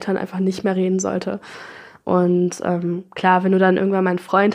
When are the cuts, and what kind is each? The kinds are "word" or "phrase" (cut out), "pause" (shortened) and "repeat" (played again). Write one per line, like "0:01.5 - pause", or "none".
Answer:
none